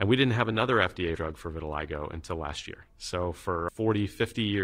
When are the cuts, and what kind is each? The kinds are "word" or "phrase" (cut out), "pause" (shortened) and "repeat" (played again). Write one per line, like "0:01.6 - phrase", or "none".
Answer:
0:01.2 - word
0:03.7 - word